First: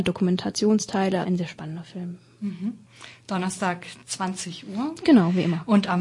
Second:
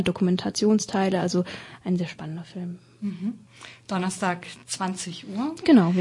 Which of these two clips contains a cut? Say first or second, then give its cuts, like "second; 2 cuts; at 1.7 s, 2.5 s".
first; 1 cut; at 1.2 s